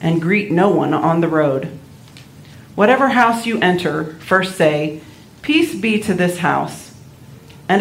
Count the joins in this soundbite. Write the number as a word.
zero